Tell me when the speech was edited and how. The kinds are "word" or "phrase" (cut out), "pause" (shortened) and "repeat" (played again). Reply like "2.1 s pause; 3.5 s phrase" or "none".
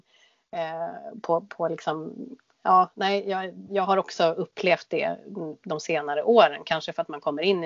none